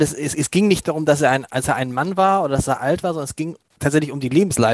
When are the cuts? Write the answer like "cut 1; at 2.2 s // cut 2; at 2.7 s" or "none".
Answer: none